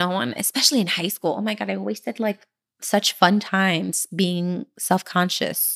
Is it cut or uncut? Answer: cut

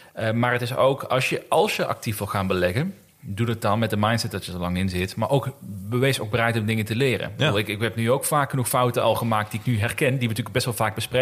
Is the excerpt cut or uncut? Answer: uncut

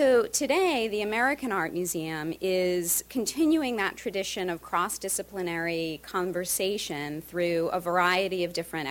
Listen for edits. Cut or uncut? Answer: uncut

